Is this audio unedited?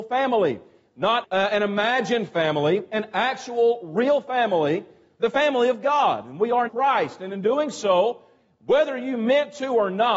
no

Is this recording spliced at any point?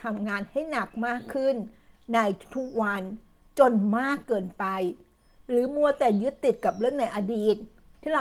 no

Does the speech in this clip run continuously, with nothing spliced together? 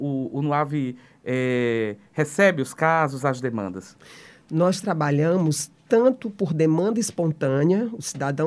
yes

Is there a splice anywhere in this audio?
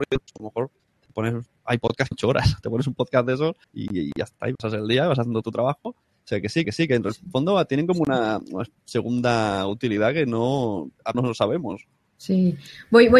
yes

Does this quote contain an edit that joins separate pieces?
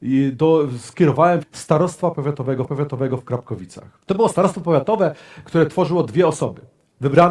yes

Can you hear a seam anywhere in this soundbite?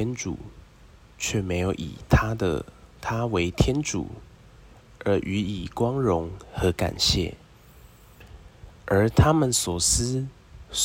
no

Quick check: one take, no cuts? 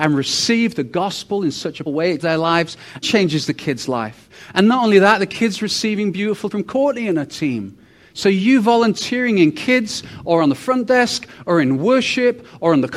no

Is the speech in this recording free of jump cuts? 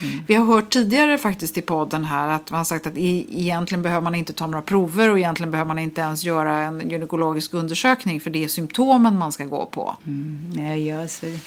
no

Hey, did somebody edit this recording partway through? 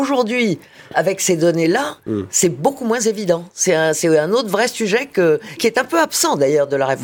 yes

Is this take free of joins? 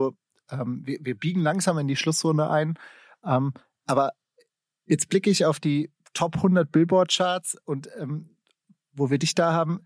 yes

